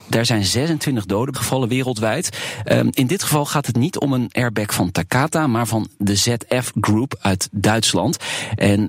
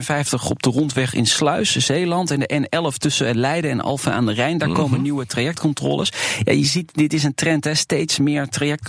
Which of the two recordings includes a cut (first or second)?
first